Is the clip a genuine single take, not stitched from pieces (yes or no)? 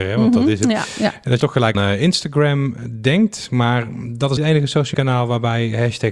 no